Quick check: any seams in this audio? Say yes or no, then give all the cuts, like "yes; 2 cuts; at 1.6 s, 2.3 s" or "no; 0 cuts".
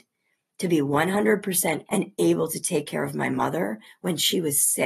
yes; 1 cut; at 1.9 s